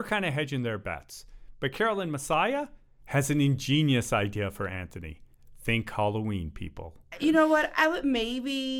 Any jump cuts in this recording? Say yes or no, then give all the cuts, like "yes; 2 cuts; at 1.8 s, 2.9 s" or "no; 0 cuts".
no; 0 cuts